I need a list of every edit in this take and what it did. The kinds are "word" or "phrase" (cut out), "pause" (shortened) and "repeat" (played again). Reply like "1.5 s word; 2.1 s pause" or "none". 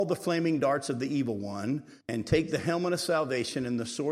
2.0 s pause